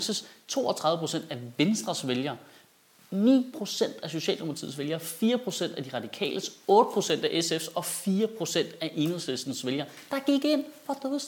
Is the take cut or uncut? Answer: uncut